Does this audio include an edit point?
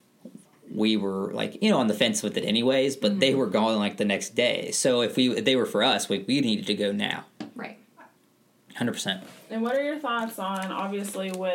no; 0 cuts

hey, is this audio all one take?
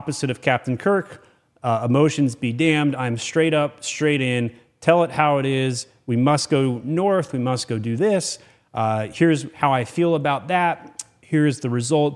yes; 0 cuts

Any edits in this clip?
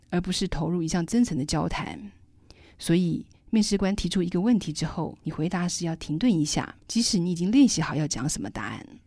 yes; 2 cuts; at 5.2 s, 6.8 s

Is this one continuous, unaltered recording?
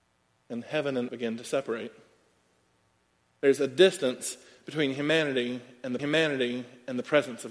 no; 2 cuts; at 1.1 s, 6.0 s

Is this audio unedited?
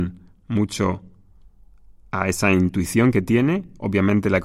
yes; 0 cuts

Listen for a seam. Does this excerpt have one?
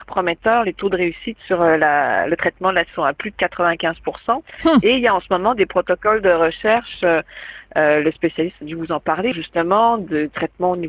yes; 3 cuts; at 2.9 s, 8.6 s, 9.3 s

